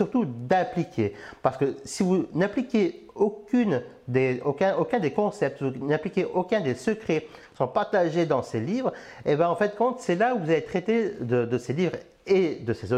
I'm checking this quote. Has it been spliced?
no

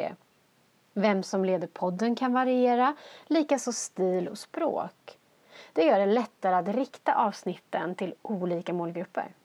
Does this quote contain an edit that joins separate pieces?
no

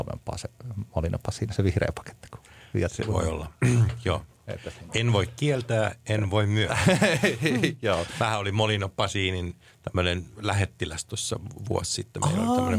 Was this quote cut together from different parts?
yes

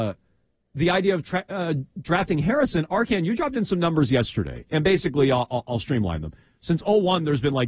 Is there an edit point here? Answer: no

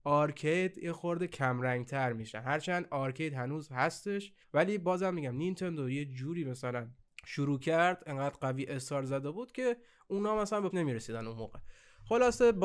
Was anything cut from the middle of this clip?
yes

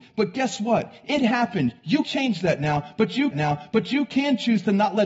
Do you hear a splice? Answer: yes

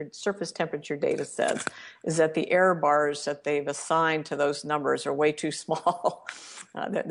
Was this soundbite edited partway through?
no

